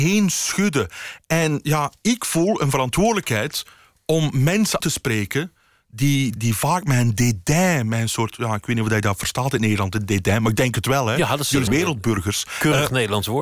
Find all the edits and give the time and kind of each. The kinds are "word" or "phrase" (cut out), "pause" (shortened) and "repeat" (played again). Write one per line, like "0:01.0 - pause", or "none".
0:04.8 - word
0:06.4 - word
0:11.7 - word